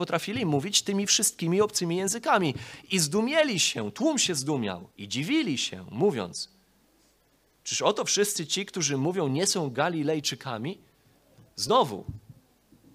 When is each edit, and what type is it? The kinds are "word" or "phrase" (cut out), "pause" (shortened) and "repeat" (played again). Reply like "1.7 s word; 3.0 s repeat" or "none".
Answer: 4.9 s pause